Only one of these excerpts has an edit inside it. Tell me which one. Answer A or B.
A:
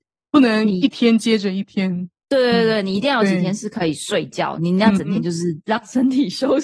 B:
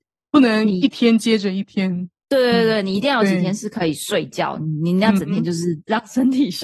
A